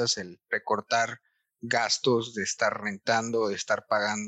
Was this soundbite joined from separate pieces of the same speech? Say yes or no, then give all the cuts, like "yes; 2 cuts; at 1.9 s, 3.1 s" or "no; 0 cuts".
no; 0 cuts